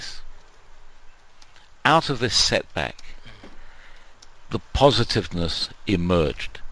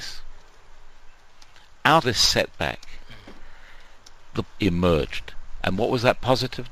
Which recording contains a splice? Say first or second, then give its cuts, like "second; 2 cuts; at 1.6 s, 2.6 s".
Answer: second; 2 cuts; at 2.0 s, 4.5 s